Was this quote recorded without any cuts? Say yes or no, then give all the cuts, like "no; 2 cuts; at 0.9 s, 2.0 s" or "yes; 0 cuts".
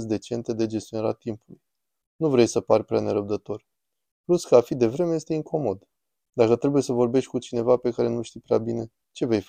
yes; 0 cuts